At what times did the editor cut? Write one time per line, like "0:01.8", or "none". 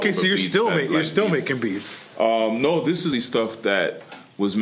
0:03.1